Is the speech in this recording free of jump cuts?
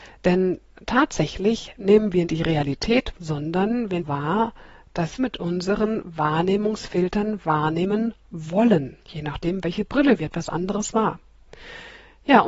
no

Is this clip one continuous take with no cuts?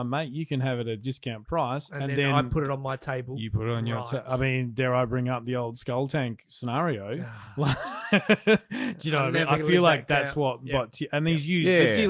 yes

